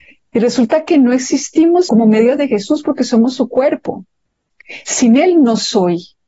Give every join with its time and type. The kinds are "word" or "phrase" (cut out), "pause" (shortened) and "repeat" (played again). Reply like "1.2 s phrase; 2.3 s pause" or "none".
1.9 s word; 2.4 s word